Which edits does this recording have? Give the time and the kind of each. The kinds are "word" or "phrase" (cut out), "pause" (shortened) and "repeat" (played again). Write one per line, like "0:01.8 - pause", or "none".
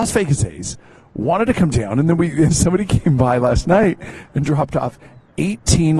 0:02.5 - word